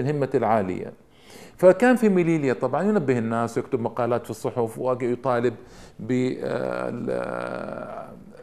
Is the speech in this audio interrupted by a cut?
no; 0 cuts

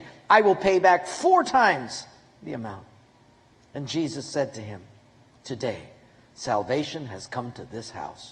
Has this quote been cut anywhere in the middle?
no; 0 cuts

